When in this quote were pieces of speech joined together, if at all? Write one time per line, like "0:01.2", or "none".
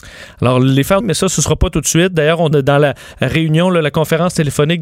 0:01.0
0:02.5

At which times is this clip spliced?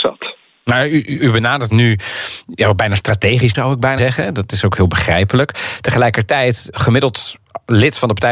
0:01.2
0:01.7
0:03.5
0:04.0
0:06.7

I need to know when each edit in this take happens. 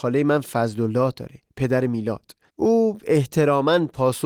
0:02.5

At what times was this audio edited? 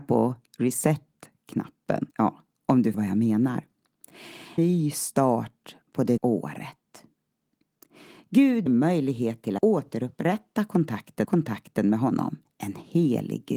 0:02.1
0:02.9
0:04.6
0:06.2
0:08.7
0:09.6
0:11.2
0:12.5

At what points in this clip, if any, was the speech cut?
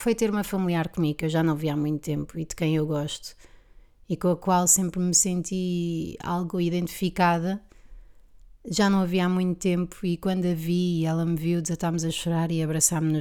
none

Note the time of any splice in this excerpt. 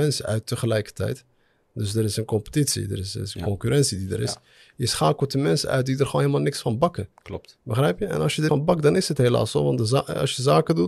0:08.5

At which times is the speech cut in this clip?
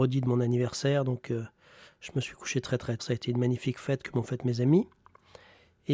0:03.0

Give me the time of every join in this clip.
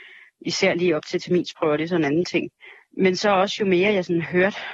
none

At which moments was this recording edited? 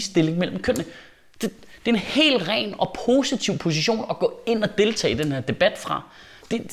none

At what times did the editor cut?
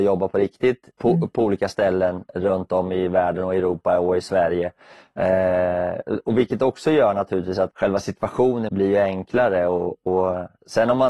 0:00.9
0:07.7
0:08.7

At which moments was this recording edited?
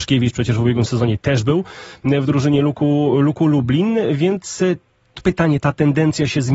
none

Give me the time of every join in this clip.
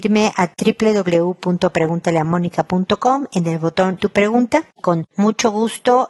0:04.0
0:04.8

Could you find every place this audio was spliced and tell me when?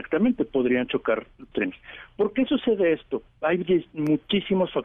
0:01.5
0:03.4

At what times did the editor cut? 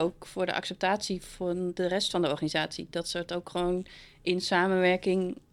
none

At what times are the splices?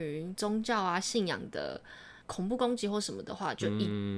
0:02.2

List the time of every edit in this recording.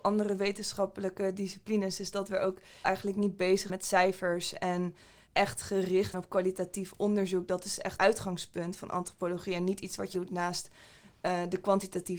0:02.8
0:03.7
0:05.3
0:06.1
0:08.0
0:10.1

